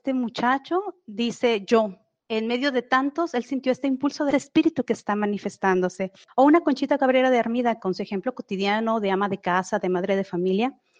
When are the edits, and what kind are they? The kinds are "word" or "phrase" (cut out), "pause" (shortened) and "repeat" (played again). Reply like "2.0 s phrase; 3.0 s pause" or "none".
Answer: none